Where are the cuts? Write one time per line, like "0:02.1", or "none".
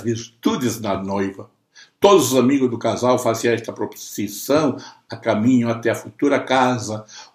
none

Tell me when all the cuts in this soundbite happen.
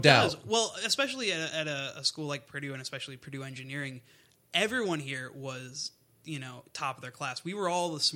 none

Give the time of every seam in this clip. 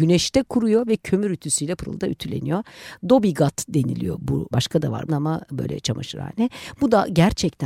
0:01.8
0:04.5
0:05.1

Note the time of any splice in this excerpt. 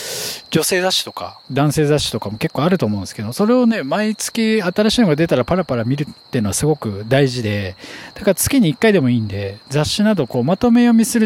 0:01.4

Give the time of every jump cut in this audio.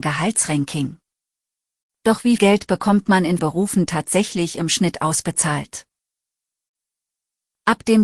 0:02.4
0:03.4
0:03.9

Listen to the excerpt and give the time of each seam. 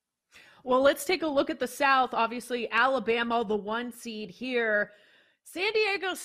none

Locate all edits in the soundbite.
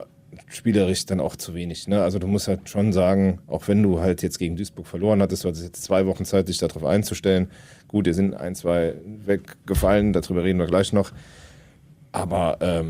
none

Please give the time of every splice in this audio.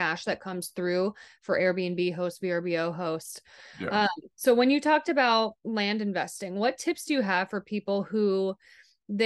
none

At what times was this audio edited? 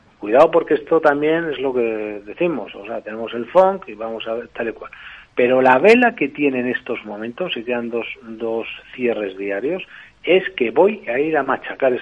none

